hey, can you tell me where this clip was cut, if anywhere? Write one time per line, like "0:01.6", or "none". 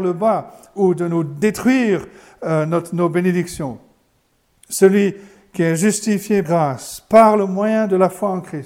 0:06.4